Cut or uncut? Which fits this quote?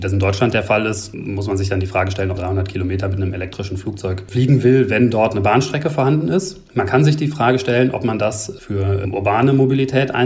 cut